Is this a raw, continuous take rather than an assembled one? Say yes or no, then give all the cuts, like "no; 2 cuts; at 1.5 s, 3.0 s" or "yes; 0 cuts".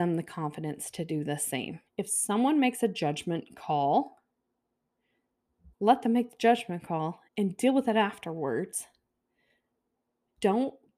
no; 3 cuts; at 1.9 s, 5.7 s, 7.3 s